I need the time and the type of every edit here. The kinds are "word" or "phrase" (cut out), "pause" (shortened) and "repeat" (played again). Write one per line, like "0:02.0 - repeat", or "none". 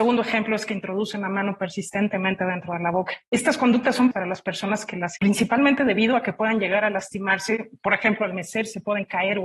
0:04.1 - word
0:05.2 - word